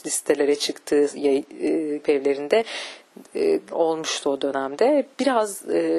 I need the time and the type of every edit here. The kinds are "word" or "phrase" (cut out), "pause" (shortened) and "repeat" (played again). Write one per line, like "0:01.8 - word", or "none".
0:02.0 - word
0:03.7 - word